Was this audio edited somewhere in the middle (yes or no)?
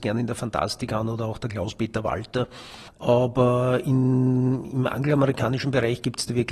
no